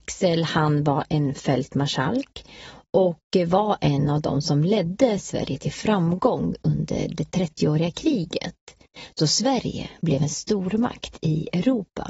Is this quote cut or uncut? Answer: uncut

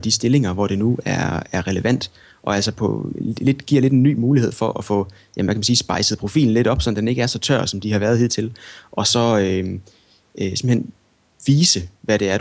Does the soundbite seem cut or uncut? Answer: uncut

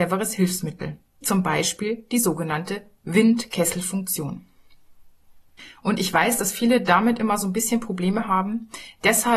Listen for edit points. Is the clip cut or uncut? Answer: cut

